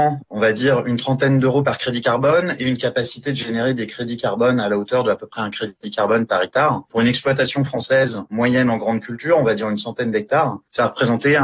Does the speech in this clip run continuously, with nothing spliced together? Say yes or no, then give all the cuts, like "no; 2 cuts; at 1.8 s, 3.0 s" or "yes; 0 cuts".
yes; 0 cuts